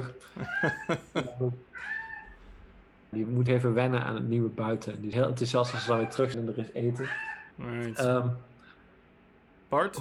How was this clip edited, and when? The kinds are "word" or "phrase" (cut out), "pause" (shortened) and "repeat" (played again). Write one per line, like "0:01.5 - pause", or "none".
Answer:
0:03.1 - word
0:03.5 - phrase
0:05.1 - word
0:06.3 - word
0:07.5 - pause